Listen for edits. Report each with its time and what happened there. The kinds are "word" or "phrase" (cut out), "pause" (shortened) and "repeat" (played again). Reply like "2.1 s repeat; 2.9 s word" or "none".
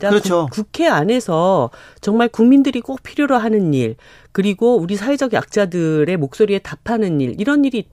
none

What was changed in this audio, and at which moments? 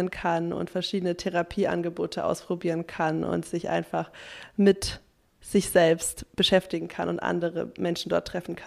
none

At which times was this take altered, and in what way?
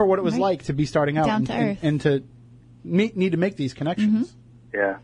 none

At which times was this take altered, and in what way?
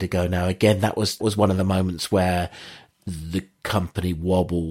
1.2 s word

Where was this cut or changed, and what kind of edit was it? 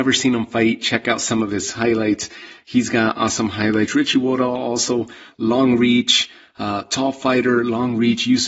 none

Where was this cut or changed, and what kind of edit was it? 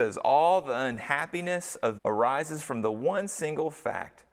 2.0 s word

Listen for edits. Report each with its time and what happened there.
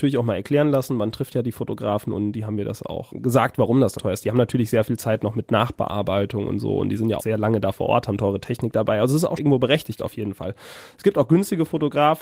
3.1 s word; 4.0 s word; 7.2 s word; 9.4 s word

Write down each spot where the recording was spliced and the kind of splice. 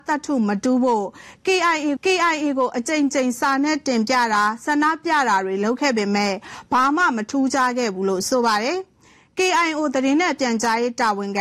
2.0 s repeat

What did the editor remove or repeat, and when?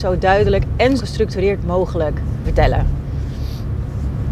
1.0 s word; 2.4 s word

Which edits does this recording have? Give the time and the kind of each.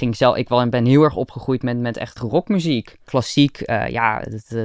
2.2 s word

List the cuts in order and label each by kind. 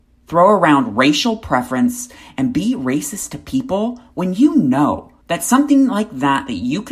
5.2 s pause

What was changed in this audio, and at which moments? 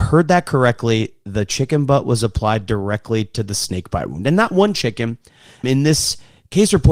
5.6 s word

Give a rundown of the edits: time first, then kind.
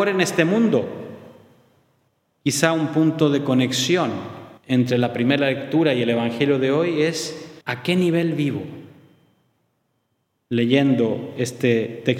2.1 s pause; 4.6 s pause; 7.6 s pause

